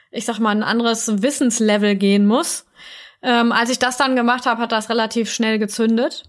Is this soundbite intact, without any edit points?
yes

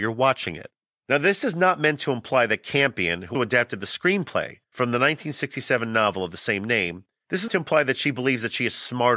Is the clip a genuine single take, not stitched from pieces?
no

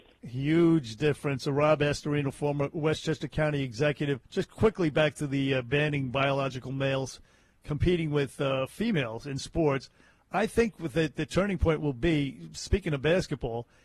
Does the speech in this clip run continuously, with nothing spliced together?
no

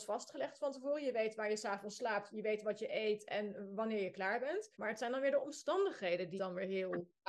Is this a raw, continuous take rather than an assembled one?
no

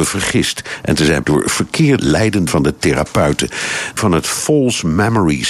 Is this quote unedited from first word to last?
no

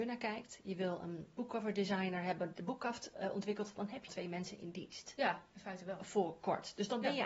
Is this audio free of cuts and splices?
no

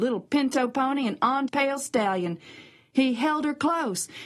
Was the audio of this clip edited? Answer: yes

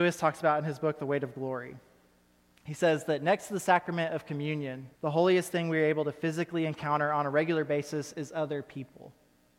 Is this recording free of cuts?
no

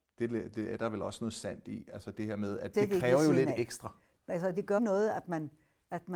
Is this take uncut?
no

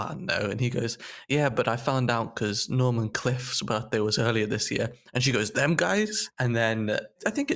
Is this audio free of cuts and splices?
yes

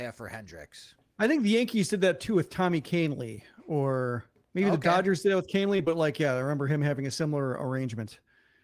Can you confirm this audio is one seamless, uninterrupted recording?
yes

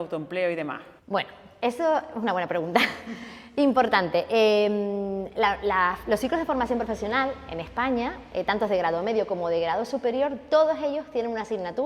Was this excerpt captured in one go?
no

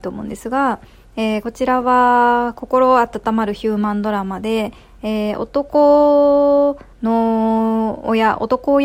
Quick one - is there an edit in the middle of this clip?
yes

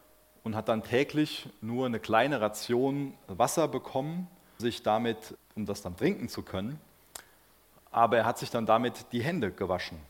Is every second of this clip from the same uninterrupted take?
no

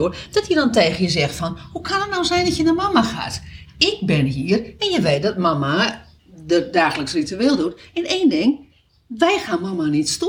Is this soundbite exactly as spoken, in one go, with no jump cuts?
yes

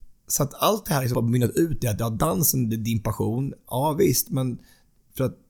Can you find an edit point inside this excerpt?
yes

